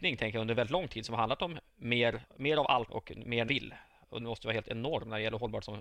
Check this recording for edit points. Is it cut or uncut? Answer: cut